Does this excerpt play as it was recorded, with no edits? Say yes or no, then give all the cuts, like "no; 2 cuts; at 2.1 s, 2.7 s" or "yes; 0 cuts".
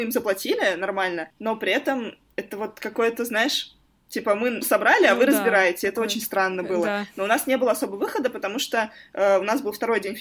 no; 1 cut; at 4.6 s